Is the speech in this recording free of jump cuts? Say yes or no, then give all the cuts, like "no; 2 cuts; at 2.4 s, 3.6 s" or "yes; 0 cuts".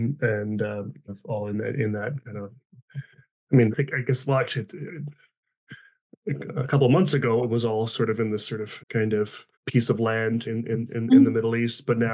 no; 5 cuts; at 1.1 s, 3.7 s, 8.8 s, 9.5 s, 10.5 s